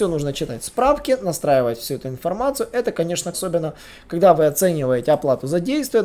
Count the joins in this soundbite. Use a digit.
1